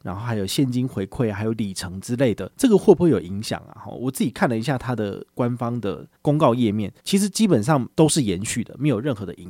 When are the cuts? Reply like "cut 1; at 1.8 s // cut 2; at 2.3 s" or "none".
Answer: cut 1; at 2.5 s // cut 2; at 6.2 s // cut 3; at 7.0 s // cut 4; at 7.9 s